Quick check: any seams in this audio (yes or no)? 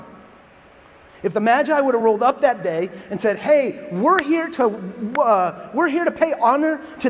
no